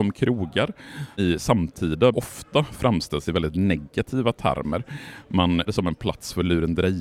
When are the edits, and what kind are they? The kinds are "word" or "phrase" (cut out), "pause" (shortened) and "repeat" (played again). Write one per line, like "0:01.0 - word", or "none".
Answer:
0:01.2 - word
0:02.1 - word
0:05.7 - word